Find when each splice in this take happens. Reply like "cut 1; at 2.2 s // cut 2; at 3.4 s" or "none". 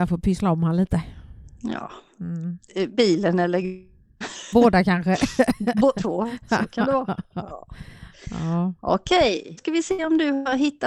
cut 1; at 4.5 s // cut 2; at 6.0 s // cut 3; at 9.6 s